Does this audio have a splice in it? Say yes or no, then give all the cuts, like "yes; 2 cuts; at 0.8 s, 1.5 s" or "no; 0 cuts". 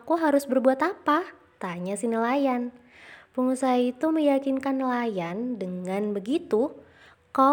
no; 0 cuts